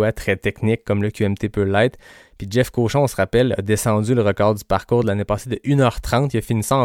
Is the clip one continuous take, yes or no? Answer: yes